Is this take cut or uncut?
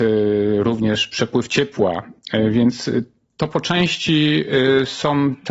uncut